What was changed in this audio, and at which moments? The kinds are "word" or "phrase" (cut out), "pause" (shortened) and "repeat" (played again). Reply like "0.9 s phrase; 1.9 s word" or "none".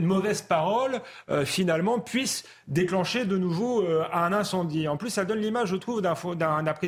none